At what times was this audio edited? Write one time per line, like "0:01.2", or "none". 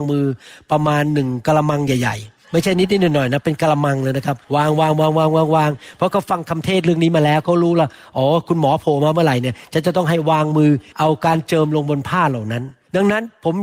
0:04.4